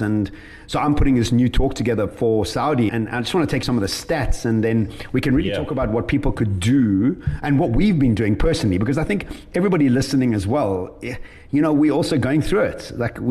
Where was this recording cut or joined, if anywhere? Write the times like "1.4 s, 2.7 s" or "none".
2.9 s, 3.6 s